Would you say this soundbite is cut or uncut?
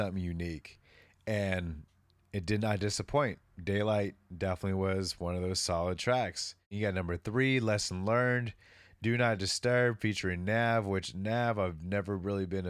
uncut